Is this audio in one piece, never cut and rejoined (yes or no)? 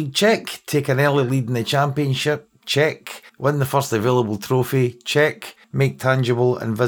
no